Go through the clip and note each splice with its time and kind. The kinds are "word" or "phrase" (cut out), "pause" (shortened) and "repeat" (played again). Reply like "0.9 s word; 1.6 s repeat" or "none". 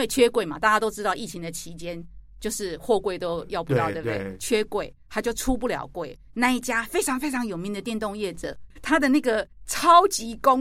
6.3 s phrase; 9.5 s pause